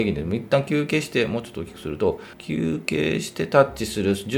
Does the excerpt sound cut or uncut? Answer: cut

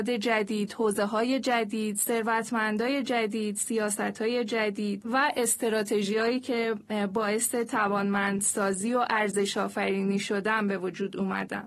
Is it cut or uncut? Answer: uncut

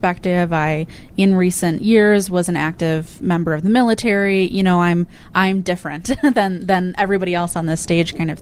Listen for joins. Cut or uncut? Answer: uncut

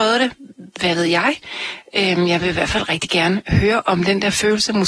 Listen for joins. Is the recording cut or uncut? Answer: uncut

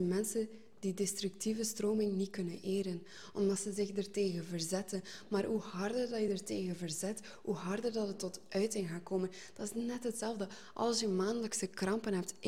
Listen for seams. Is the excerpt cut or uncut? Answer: uncut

